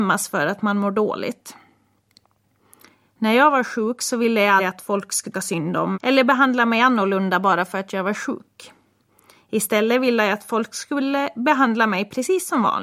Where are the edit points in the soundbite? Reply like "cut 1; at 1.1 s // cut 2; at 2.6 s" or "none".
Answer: cut 1; at 4.6 s // cut 2; at 5.3 s // cut 3; at 5.9 s